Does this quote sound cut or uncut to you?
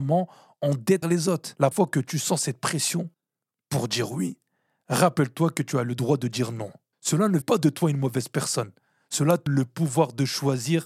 cut